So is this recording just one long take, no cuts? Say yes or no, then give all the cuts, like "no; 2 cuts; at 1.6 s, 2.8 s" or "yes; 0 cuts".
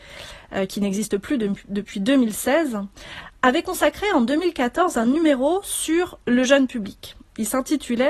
yes; 0 cuts